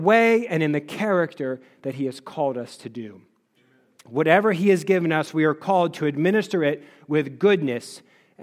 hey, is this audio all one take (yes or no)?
yes